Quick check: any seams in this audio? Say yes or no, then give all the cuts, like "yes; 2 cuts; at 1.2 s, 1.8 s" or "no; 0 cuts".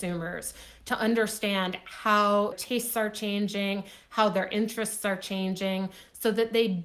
yes; 1 cut; at 2.5 s